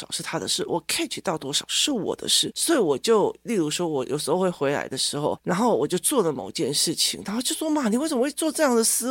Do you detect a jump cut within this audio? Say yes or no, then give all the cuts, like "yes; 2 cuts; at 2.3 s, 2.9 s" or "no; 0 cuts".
no; 0 cuts